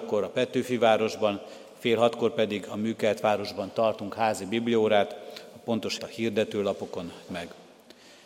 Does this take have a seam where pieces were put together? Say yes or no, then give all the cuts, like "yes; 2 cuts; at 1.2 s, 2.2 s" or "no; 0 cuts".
yes; 2 cuts; at 6.0 s, 7.3 s